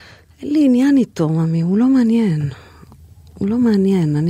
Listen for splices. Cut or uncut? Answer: uncut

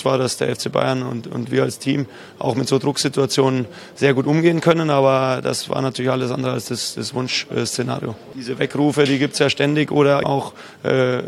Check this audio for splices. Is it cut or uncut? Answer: cut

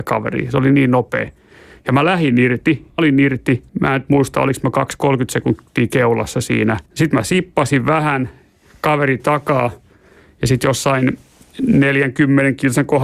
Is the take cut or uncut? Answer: cut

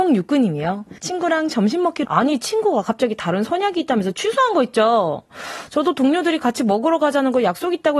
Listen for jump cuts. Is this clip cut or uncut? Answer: cut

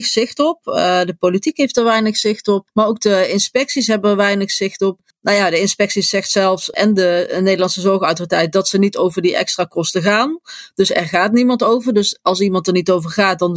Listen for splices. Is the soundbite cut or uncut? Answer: uncut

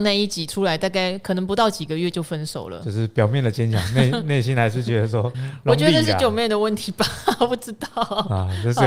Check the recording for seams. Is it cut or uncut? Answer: cut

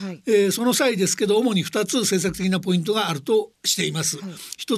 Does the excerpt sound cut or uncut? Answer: cut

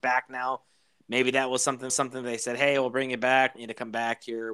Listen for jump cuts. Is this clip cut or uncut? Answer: cut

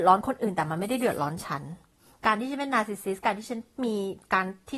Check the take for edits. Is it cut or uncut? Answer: uncut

